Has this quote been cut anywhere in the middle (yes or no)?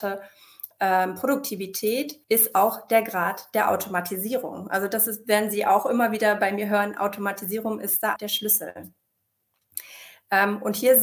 yes